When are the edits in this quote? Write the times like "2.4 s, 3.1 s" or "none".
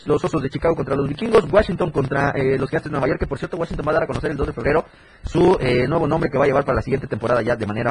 none